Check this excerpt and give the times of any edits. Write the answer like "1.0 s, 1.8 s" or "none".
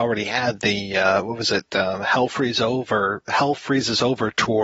none